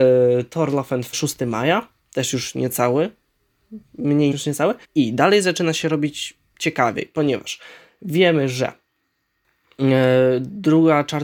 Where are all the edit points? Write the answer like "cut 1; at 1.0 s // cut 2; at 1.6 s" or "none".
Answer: cut 1; at 1.1 s // cut 2; at 2.0 s // cut 3; at 4.3 s // cut 4; at 4.8 s